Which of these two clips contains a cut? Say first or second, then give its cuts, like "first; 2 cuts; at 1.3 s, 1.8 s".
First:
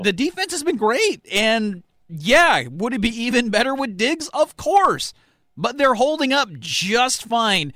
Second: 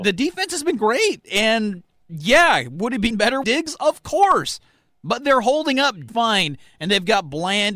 second; 3 cuts; at 3.1 s, 3.4 s, 6.1 s